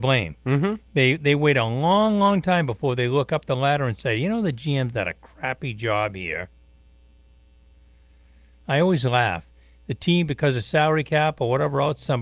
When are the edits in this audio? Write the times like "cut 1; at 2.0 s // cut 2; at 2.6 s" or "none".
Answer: none

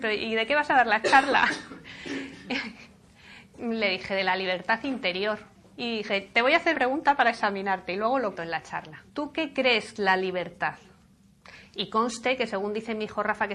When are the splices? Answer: cut 1; at 3.6 s // cut 2; at 5.5 s // cut 3; at 6.7 s // cut 4; at 8.3 s // cut 5; at 9.1 s // cut 6; at 9.9 s

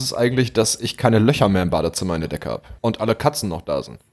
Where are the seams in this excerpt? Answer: cut 1; at 2.8 s

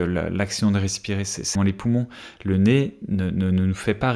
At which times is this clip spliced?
cut 1; at 1.6 s

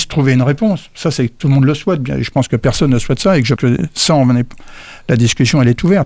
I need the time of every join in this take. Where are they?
cut 1; at 3.6 s

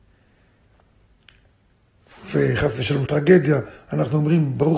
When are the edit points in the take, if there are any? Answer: cut 1; at 3.1 s

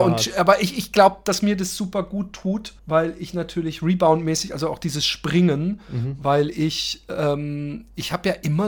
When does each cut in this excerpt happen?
cut 1; at 2.8 s

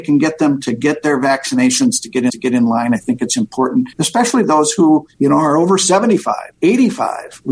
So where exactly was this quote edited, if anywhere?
cut 1; at 2.3 s // cut 2; at 3.9 s // cut 3; at 5.1 s // cut 4; at 6.5 s

